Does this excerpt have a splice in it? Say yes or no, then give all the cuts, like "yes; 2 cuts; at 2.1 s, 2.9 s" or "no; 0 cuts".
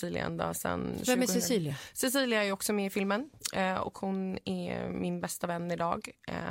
no; 0 cuts